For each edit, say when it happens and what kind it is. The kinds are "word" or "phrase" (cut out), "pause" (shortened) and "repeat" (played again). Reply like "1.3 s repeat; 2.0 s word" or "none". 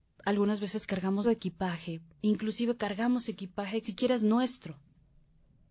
1.2 s word; 2.1 s pause; 3.8 s phrase